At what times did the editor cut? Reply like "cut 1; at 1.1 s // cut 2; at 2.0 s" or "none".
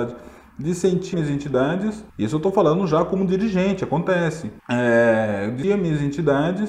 cut 1; at 1.1 s // cut 2; at 2.1 s // cut 3; at 4.6 s // cut 4; at 5.6 s